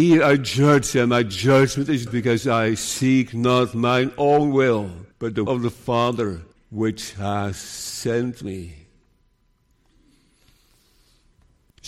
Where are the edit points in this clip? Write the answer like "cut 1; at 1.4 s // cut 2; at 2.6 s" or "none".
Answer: cut 1; at 2.1 s // cut 2; at 5.1 s // cut 3; at 5.5 s // cut 4; at 6.5 s